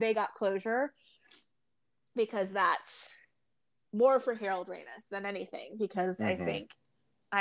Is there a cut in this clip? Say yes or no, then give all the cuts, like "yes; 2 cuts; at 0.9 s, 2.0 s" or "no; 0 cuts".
no; 0 cuts